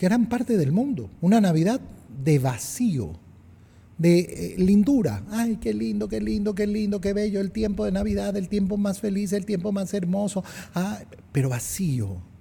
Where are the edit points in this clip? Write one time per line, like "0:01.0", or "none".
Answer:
0:01.2